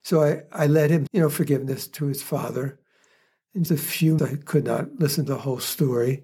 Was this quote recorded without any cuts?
no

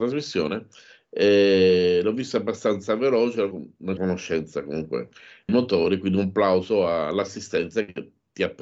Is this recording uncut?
no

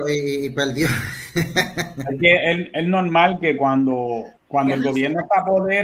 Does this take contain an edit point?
yes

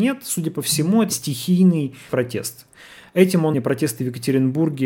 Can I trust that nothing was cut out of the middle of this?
no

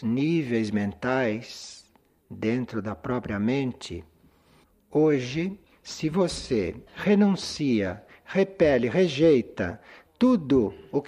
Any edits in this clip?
yes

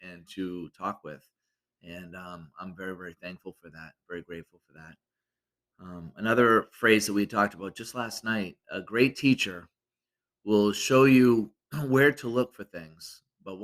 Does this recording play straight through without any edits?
no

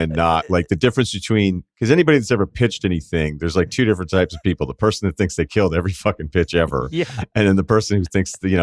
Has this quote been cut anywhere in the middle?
no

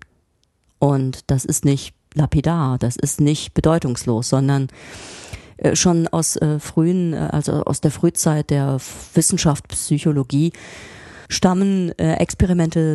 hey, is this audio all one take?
no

